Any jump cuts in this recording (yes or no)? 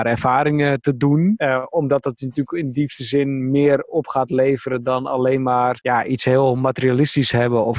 no